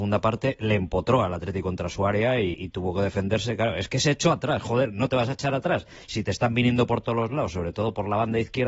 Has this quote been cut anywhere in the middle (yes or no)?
yes